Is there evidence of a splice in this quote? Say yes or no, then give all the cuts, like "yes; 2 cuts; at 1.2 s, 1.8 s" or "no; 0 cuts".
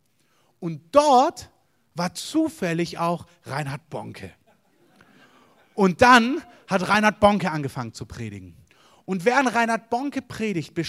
no; 0 cuts